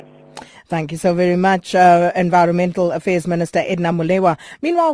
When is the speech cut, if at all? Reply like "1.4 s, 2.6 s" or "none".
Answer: none